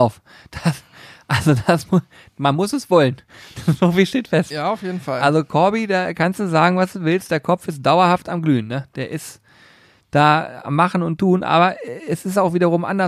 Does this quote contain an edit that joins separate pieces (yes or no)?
no